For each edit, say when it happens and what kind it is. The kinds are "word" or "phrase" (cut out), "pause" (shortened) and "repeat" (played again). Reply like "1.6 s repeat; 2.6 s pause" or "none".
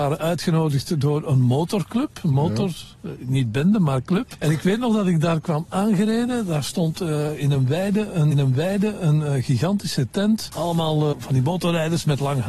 8.3 s repeat; 11.1 s word